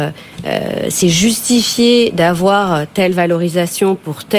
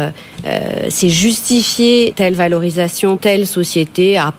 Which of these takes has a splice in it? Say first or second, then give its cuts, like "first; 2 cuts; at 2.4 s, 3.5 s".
second; 2 cuts; at 2.1 s, 3.2 s